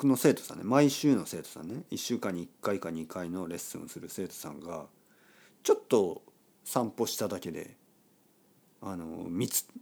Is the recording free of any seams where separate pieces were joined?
yes; 0 cuts

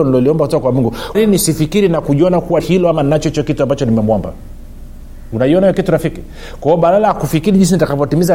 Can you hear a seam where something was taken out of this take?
yes; 2 cuts; at 1.1 s, 2.6 s

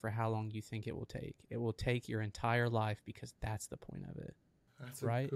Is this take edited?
no; 0 cuts

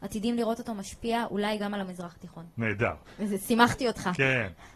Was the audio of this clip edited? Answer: no; 0 cuts

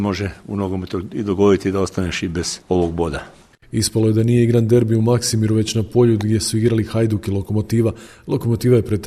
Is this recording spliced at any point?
no; 0 cuts

